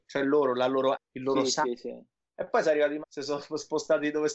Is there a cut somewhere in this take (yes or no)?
yes